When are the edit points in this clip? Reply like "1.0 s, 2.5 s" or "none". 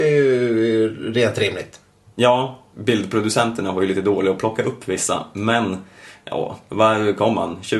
2.7 s